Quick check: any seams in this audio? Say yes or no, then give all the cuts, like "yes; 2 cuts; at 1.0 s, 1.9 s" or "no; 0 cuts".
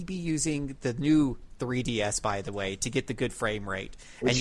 no; 0 cuts